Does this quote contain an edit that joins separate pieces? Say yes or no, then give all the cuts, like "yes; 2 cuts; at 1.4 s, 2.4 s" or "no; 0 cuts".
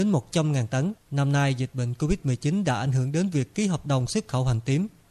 no; 0 cuts